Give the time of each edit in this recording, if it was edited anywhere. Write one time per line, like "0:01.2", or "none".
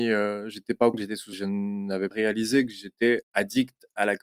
0:00.9
0:01.3
0:02.1